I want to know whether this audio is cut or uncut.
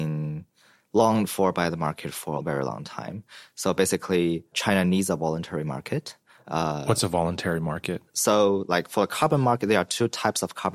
uncut